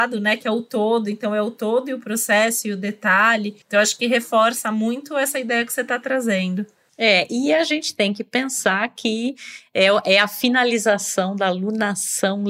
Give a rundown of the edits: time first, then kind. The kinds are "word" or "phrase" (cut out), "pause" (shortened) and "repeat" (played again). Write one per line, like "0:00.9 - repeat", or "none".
0:03.6 - pause